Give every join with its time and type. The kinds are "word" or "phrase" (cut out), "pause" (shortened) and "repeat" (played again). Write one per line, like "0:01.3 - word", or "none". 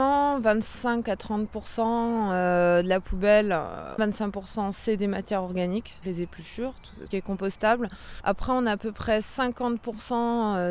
0:04.0 - phrase
0:06.0 - word
0:07.1 - phrase

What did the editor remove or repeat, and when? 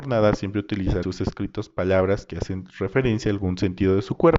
0:01.0 - word

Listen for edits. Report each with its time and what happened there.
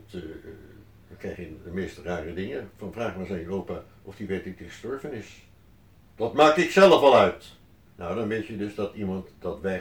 0:06.1 - pause
0:07.9 - pause

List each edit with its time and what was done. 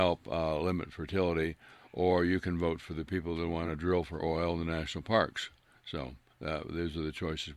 none

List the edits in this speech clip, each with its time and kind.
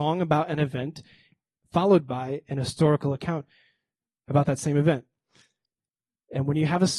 none

